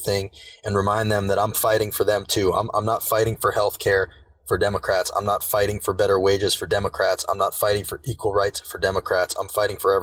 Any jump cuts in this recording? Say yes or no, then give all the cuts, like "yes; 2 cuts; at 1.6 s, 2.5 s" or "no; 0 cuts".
no; 0 cuts